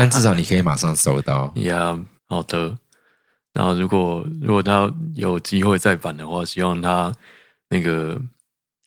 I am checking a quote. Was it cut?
yes; 1 cut; at 2.2 s

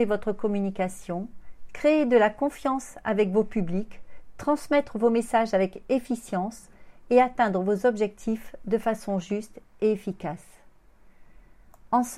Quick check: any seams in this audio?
no; 0 cuts

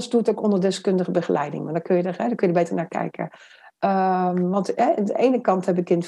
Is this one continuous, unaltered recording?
yes; 0 cuts

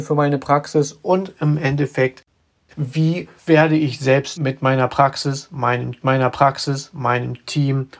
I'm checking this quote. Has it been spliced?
yes; 3 cuts; at 3.4 s, 4.4 s, 6.0 s

